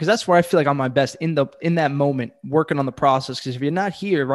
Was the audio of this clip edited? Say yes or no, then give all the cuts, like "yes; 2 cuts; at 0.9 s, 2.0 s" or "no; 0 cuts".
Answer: no; 0 cuts